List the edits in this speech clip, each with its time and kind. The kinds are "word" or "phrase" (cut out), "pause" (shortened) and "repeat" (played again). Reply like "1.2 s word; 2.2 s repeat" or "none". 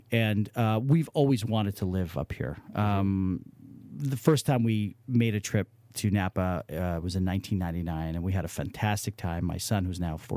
none